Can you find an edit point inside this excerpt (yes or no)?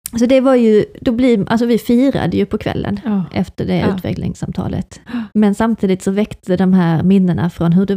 yes